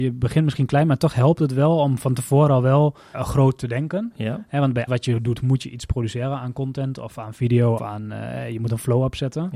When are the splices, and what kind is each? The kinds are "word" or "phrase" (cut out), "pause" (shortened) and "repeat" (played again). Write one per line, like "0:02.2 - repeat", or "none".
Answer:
0:03.1 - word
0:04.9 - word
0:07.8 - word